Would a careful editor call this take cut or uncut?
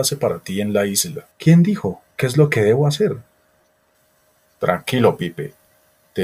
cut